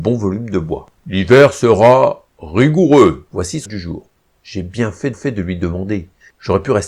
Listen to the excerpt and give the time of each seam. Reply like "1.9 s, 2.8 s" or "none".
0.9 s, 3.3 s, 3.7 s, 4.2 s, 5.1 s